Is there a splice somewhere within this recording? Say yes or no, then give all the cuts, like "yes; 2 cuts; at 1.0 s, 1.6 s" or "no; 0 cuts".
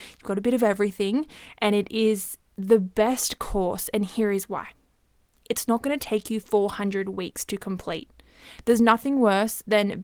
yes; 1 cut; at 2.5 s